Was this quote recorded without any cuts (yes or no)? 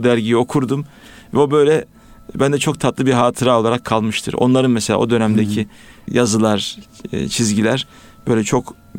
yes